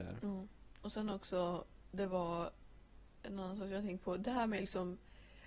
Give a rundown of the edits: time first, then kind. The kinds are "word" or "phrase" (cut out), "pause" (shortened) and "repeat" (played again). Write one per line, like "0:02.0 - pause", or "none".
none